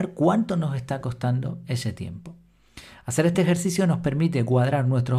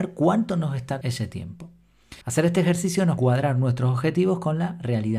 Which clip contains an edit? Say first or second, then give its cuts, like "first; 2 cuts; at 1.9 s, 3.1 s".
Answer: second; 3 cuts; at 1.0 s, 2.2 s, 3.2 s